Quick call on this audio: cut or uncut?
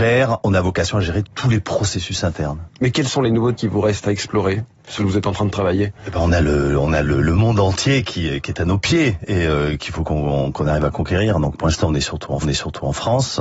cut